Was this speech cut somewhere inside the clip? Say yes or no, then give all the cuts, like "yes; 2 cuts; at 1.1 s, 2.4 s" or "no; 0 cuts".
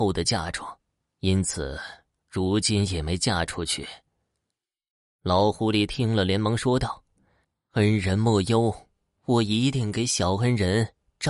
no; 0 cuts